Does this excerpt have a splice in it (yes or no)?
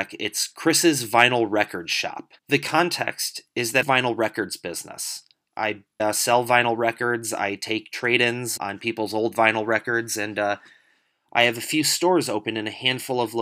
yes